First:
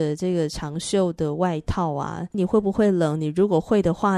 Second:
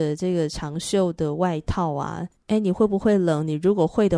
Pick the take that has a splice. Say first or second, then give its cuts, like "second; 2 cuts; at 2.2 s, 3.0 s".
first; 1 cut; at 2.3 s